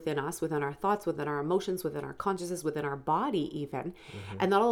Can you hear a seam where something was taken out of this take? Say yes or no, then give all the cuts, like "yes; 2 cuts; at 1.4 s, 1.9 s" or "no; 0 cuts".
no; 0 cuts